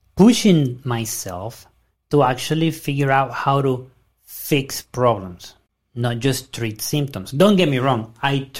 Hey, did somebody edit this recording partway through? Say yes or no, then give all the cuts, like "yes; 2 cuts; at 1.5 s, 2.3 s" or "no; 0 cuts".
no; 0 cuts